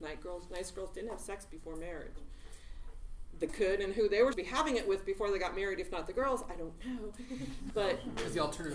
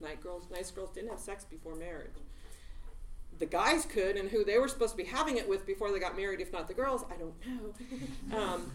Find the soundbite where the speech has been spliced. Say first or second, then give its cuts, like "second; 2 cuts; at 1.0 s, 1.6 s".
first; 3 cuts; at 3.5 s, 4.3 s, 7.7 s